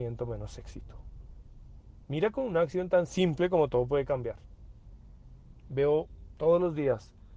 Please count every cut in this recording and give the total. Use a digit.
1